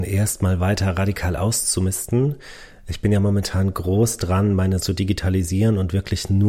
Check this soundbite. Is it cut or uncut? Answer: cut